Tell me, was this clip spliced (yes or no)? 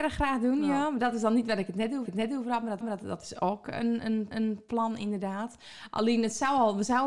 yes